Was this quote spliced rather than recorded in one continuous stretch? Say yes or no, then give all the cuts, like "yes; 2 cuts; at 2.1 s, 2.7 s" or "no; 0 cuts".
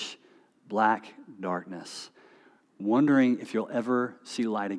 no; 0 cuts